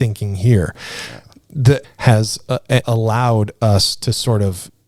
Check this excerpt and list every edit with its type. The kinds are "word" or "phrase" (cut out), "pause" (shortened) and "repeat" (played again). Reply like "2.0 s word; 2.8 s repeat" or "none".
1.8 s phrase; 2.8 s word